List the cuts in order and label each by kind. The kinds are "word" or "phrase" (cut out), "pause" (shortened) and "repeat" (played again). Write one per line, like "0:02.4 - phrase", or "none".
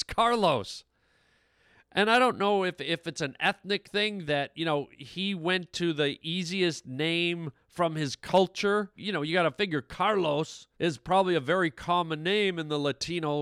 0:04.3 - word
0:09.0 - phrase
0:10.7 - pause